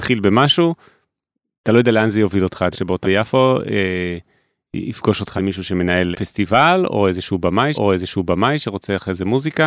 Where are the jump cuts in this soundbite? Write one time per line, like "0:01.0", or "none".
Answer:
0:02.7
0:03.0
0:05.4
0:06.1
0:07.7